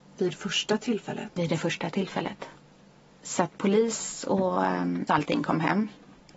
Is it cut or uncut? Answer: cut